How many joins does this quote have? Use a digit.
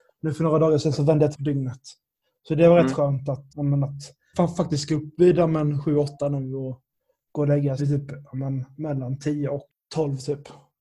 4